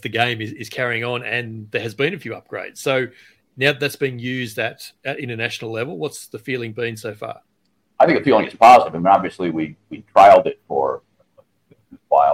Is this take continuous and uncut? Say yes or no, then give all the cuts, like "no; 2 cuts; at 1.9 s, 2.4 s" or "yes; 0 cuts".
yes; 0 cuts